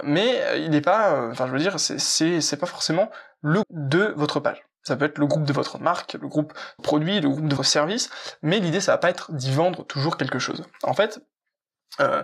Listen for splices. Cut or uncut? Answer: cut